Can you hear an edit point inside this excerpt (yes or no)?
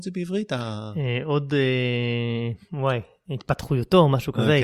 no